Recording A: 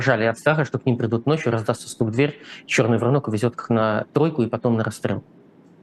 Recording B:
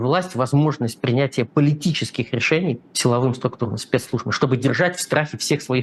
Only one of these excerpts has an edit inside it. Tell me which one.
B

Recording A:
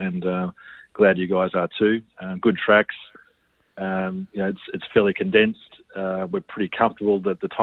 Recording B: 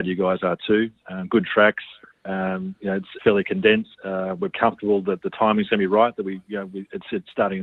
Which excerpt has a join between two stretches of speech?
B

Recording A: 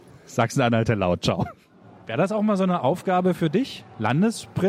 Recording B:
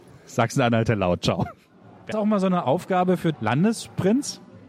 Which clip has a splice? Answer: B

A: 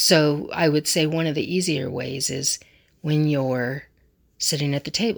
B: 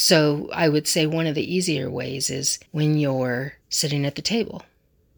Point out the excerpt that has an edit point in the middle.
B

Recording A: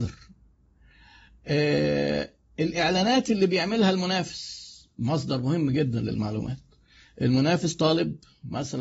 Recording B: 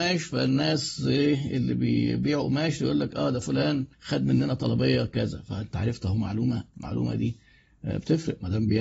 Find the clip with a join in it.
B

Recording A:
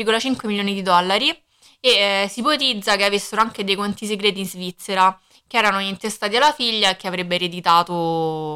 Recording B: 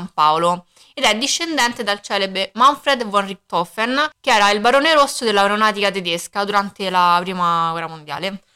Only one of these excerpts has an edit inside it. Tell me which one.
B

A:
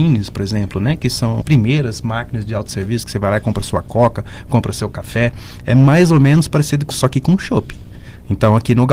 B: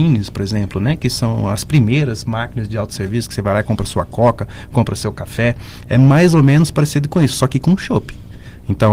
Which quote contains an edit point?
A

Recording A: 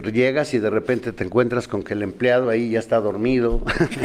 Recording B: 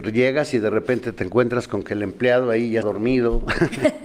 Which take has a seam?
B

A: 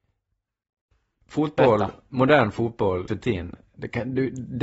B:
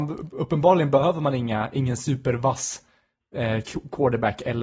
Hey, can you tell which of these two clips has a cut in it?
A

